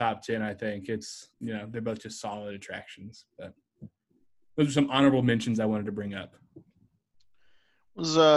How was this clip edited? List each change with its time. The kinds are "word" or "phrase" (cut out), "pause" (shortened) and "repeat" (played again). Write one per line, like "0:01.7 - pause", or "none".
0:01.3 - pause